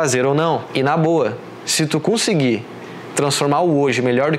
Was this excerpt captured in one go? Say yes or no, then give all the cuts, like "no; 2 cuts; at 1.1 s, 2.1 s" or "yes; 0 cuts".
yes; 0 cuts